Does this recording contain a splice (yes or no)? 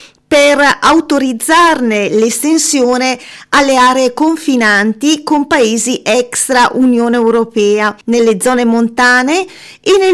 yes